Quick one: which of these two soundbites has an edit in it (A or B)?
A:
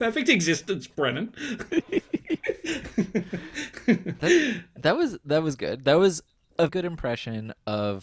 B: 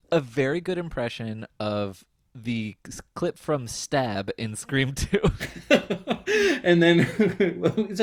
A